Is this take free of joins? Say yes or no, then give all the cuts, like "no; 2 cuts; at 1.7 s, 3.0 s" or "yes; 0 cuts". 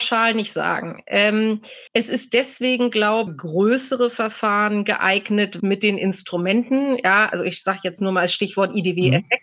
no; 3 cuts; at 1.9 s, 3.3 s, 5.6 s